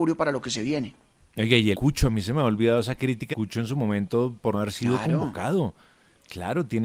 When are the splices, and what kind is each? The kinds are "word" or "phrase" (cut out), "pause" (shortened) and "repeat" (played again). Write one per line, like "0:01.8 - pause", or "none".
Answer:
0:01.7 - word
0:03.3 - word
0:04.5 - word